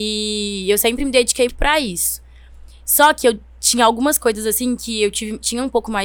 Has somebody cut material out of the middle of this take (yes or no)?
yes